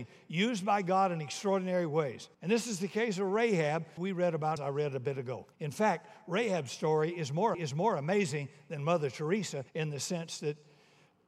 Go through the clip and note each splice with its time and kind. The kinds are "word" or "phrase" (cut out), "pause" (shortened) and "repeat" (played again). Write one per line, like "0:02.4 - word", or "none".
0:02.3 - pause
0:04.0 - word
0:04.6 - phrase
0:05.5 - pause
0:07.5 - repeat
0:09.7 - pause